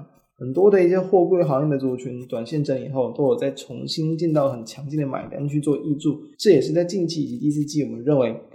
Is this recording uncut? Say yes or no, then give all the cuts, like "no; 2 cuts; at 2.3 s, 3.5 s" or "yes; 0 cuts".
no; 1 cut; at 6.3 s